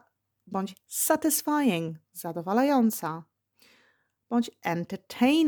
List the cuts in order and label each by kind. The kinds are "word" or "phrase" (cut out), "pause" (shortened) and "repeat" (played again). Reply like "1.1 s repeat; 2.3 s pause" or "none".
2.0 s pause